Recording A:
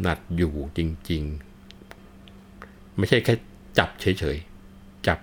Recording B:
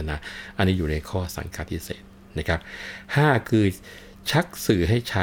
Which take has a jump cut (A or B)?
A